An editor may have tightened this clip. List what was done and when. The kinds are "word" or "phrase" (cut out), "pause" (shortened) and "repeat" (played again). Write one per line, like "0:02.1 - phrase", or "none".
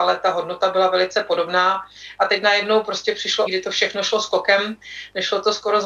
0:03.5 - word

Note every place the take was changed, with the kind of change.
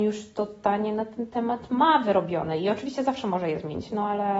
none

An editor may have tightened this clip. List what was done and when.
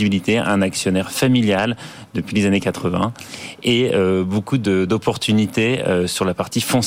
none

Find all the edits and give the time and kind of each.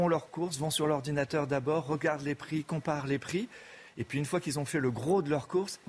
none

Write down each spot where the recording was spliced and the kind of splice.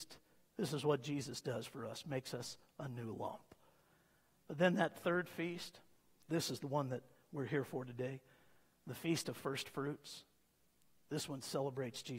none

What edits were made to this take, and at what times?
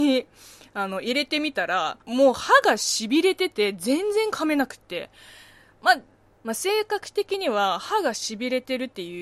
0:02.0 - pause

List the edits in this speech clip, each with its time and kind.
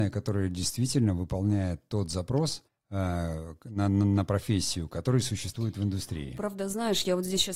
0:02.7 - pause

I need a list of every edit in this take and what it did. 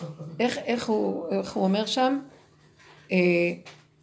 none

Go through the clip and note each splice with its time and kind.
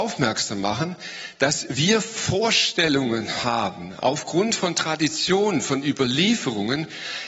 none

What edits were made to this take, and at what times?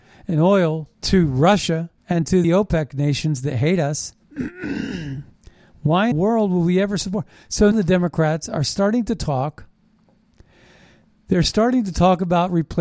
0:00.9 - pause
0:02.0 - pause
0:02.4 - word
0:04.2 - pause
0:06.1 - word
0:07.7 - word

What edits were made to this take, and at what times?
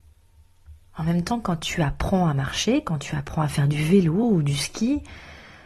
none

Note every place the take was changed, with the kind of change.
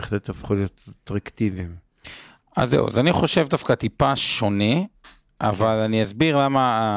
none

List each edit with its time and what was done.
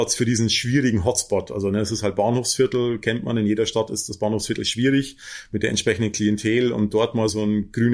none

